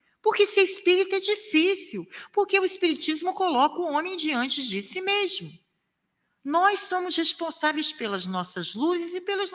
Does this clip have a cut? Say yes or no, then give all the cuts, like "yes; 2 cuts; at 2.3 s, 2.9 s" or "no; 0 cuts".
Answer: no; 0 cuts